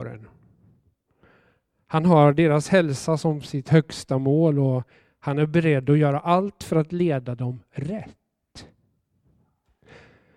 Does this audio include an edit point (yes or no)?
no